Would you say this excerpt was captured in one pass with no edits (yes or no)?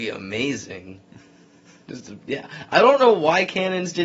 yes